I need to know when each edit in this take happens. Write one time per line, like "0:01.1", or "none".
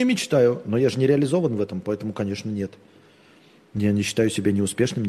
none